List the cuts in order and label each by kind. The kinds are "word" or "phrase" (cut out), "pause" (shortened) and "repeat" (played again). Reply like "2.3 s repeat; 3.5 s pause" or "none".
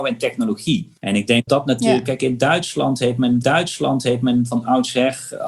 1.0 s pause; 1.5 s word; 3.4 s repeat